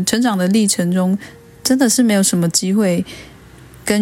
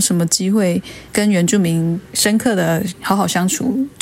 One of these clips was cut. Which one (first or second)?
second